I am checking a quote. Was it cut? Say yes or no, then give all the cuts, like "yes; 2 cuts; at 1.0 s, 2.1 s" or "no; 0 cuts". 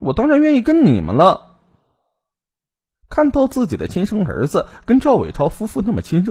no; 0 cuts